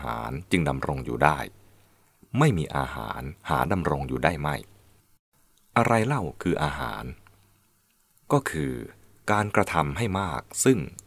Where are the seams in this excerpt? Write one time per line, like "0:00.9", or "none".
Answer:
0:03.4